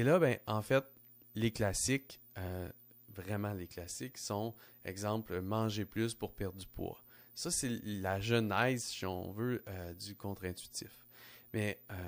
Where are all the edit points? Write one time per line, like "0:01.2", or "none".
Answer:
none